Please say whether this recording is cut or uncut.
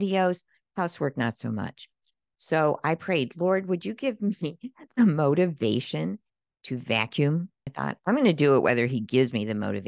uncut